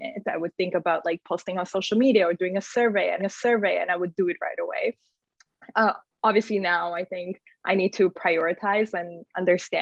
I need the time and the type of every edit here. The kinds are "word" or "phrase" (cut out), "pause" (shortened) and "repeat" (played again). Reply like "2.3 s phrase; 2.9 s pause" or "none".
3.2 s repeat